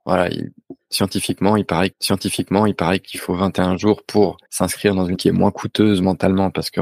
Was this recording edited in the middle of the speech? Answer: yes; 3 cuts; at 1.9 s, 4.4 s, 5.1 s

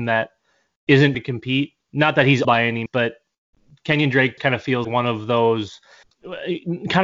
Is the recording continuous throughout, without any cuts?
no; 7 cuts; at 1.1 s, 1.8 s, 2.4 s, 2.9 s, 4.4 s, 4.8 s, 6.0 s

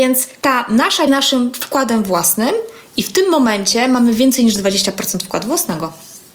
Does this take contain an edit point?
yes; 1 cut; at 1.1 s

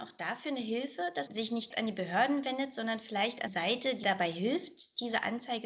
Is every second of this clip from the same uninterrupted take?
no; 4 cuts; at 1.3 s, 1.7 s, 3.5 s, 4.0 s

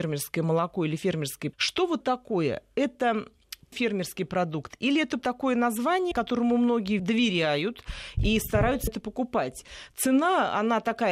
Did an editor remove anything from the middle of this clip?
yes; 7 cuts; at 1.5 s, 2.0 s, 3.7 s, 5.2 s, 6.1 s, 7.0 s, 8.9 s

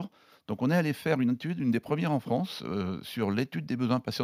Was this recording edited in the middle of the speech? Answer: no; 0 cuts

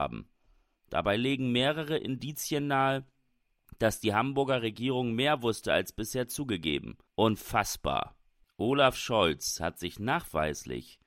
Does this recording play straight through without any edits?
no; 1 cut; at 7.1 s

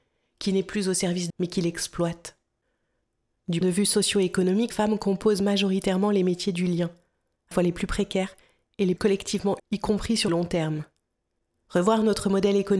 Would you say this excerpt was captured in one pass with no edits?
no; 7 cuts; at 1.3 s, 3.6 s, 4.7 s, 7.5 s, 9.0 s, 9.6 s, 10.3 s

